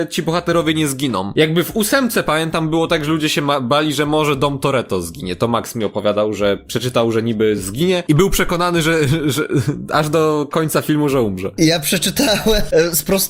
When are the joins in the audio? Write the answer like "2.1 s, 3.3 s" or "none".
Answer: none